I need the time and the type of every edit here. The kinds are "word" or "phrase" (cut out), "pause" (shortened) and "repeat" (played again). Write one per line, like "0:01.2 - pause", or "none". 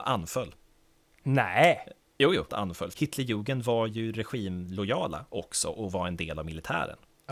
0:02.0 - pause
0:02.5 - phrase
0:02.9 - word